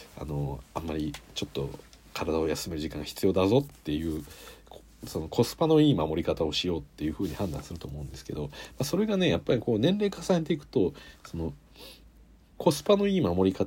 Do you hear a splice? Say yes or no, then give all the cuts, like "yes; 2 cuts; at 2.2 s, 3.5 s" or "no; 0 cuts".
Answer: no; 0 cuts